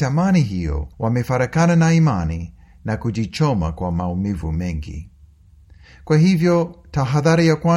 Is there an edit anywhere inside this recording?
yes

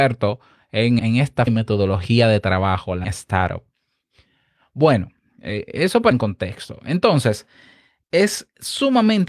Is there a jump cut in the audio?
yes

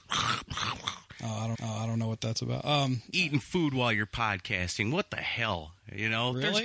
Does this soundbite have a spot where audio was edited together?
yes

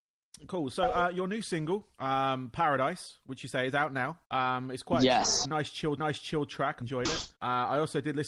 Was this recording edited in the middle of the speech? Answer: yes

